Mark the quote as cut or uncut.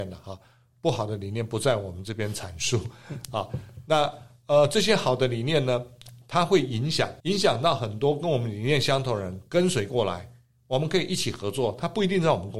cut